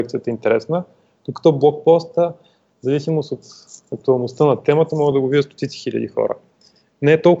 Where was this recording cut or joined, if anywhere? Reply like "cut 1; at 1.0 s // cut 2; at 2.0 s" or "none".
none